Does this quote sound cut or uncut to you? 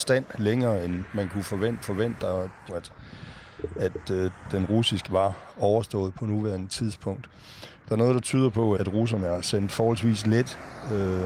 cut